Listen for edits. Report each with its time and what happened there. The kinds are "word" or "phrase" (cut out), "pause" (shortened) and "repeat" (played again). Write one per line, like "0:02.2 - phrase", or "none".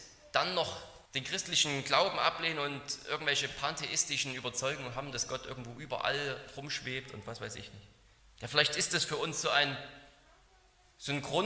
0:01.1 - pause
0:08.2 - pause